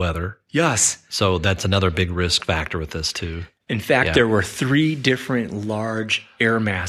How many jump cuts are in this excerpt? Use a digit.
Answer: 0